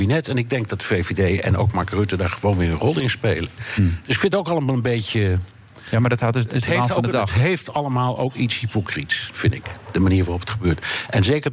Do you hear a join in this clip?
no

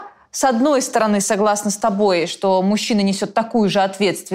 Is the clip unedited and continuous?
yes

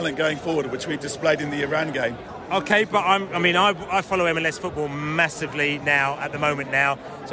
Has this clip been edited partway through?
no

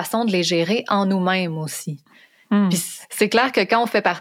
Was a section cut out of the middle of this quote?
no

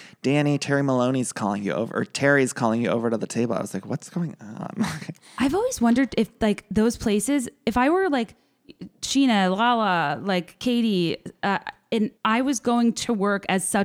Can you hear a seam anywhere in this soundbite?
yes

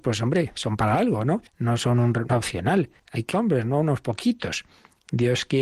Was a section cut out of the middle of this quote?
yes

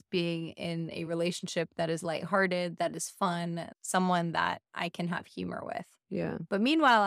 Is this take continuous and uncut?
yes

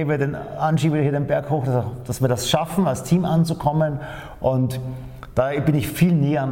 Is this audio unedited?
yes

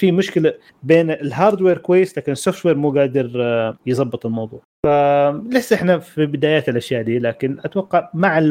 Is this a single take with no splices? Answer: no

